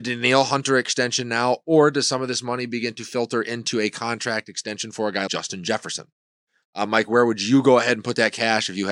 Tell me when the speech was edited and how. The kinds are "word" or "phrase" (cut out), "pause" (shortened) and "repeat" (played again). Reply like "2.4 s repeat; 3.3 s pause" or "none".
5.3 s word

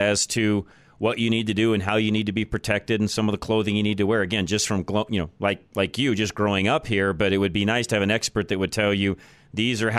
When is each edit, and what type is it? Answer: none

